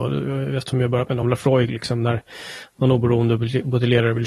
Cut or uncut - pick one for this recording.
uncut